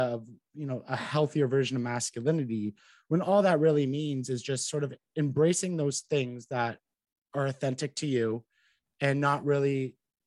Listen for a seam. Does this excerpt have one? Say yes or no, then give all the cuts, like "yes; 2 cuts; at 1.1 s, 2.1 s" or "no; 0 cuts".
no; 0 cuts